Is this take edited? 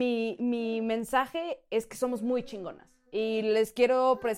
yes; 1 cut; at 3.1 s

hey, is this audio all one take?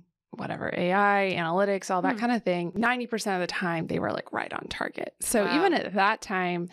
yes; 0 cuts

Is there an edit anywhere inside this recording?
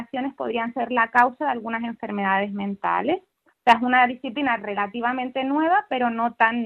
no; 0 cuts

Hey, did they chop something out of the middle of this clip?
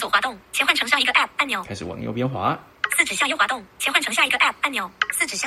no; 0 cuts

